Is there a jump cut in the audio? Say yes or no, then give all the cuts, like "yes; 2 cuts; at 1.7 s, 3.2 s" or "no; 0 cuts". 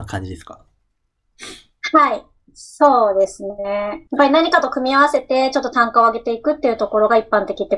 yes; 1 cut; at 4.1 s